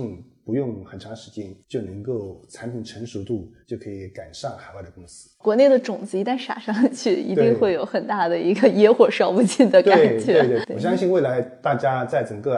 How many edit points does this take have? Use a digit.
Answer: 3